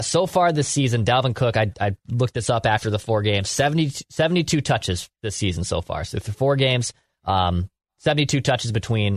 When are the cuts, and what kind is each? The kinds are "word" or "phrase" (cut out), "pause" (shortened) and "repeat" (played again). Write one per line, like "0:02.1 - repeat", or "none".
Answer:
none